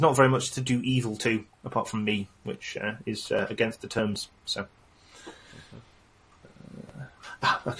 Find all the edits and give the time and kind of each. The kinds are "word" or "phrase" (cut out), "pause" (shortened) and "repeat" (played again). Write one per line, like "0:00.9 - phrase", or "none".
none